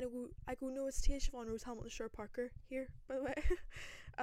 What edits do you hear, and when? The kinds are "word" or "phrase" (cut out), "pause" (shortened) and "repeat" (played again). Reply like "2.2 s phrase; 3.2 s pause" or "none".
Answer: none

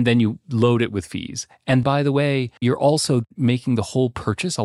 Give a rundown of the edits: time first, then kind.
1.8 s word; 2.6 s pause

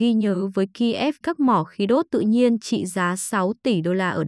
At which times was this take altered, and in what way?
1.2 s phrase

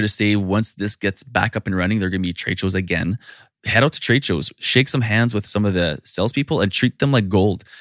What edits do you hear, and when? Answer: none

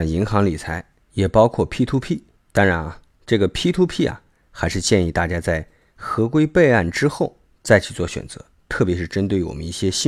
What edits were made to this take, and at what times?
none

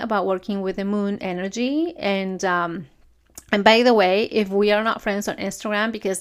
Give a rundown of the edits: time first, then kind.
none

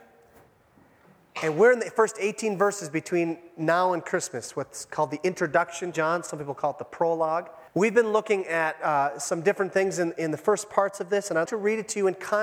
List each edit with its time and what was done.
5.9 s phrase; 7.7 s pause; 11.5 s word

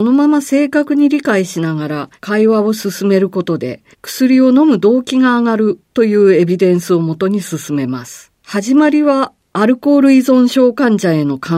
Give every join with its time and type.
2.2 s pause; 3.9 s pause; 5.9 s pause; 8.4 s pause

